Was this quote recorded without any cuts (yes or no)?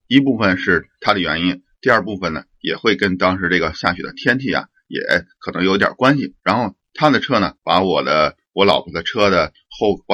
no